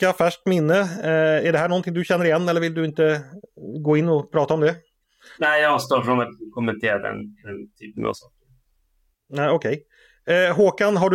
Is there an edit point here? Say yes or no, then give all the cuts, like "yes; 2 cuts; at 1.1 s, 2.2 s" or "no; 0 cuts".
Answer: no; 0 cuts